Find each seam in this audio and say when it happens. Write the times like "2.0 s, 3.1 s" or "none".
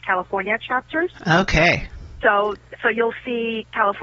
2.8 s